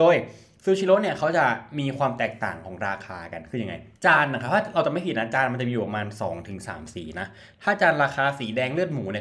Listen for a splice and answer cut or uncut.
cut